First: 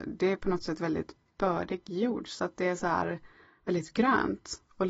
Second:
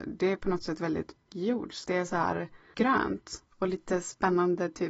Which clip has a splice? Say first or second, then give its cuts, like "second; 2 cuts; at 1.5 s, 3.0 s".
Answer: second; 3 cuts; at 1.3 s, 1.8 s, 2.7 s